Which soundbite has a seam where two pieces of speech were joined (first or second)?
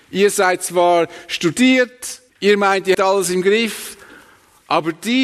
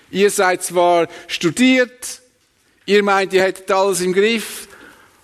first